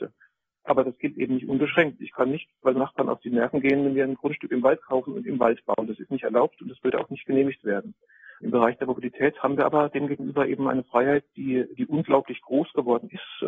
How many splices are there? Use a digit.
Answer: 2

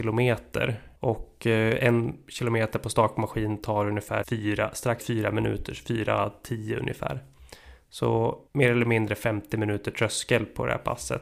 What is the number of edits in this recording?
4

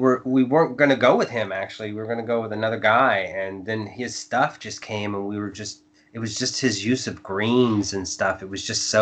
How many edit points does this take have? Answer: 0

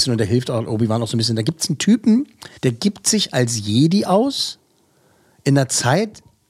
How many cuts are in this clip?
1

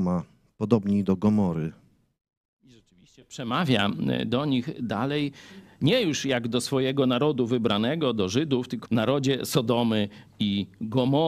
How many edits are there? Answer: 1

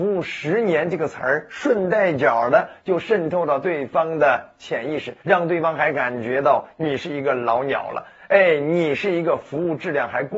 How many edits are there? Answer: 1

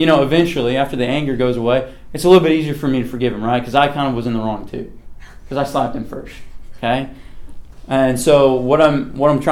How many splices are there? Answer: 0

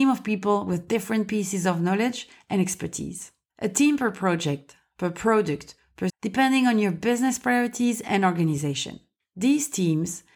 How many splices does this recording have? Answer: 1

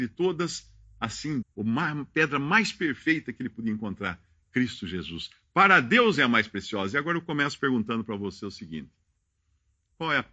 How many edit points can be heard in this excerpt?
1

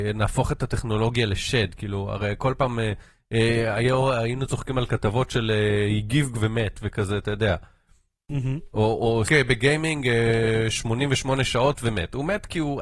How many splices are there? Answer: 2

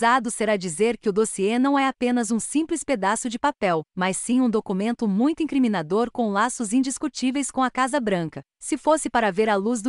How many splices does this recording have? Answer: 1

